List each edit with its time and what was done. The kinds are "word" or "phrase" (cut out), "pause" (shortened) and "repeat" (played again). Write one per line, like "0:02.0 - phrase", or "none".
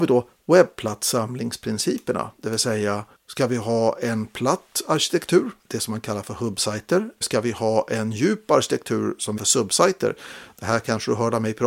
0:03.1 - pause
0:05.6 - pause
0:07.2 - word
0:09.4 - phrase